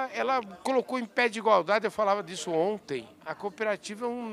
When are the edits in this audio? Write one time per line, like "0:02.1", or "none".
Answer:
none